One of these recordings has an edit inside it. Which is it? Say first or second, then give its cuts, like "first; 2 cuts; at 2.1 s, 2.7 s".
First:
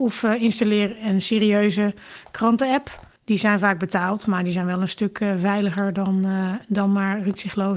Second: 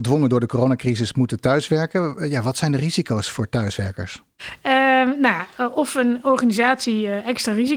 first; 1 cut; at 3.2 s